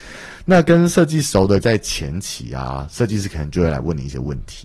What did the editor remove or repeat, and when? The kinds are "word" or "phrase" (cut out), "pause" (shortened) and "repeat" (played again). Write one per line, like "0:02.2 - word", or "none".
0:01.6 - phrase